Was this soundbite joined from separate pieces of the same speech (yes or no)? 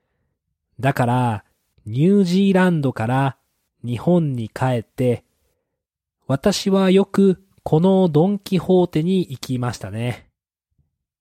no